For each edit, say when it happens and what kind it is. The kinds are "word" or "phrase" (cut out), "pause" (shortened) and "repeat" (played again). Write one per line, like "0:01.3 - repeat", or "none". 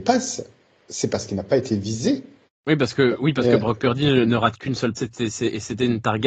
0:02.5 - pause
0:04.9 - word